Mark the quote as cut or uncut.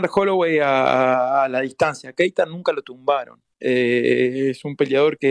uncut